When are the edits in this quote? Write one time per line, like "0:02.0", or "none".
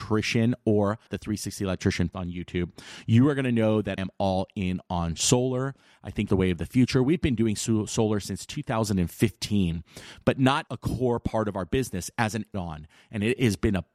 0:01.1
0:02.1
0:04.0
0:06.3
0:10.7
0:12.5